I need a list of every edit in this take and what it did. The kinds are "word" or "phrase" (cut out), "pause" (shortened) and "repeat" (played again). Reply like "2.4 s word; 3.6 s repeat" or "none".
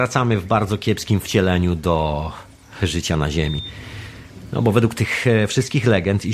none